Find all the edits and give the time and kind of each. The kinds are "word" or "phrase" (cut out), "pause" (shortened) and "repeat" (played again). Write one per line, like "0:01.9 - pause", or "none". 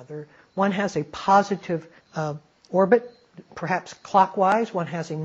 0:02.0 - pause